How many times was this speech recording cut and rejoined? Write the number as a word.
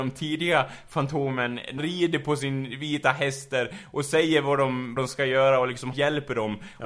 three